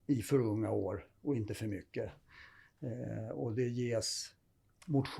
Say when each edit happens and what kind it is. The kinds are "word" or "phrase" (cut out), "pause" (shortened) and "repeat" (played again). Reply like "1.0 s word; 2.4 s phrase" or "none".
none